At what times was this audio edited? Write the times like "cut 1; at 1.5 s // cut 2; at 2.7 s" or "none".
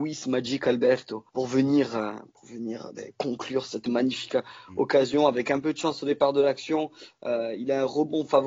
cut 1; at 1.3 s